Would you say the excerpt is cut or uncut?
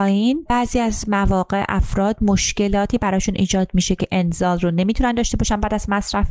uncut